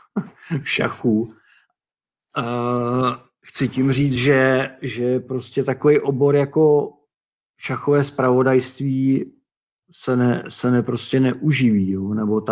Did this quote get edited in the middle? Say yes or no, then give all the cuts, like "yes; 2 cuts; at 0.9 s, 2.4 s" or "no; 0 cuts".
no; 0 cuts